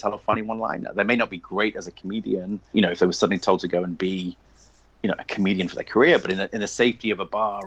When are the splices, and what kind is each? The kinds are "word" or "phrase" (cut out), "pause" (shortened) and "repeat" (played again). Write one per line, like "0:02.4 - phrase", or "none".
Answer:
0:02.7 - word